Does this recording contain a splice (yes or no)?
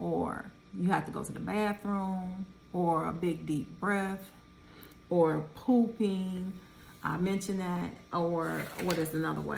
yes